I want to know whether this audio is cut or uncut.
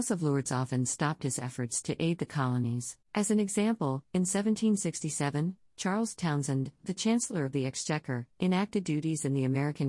cut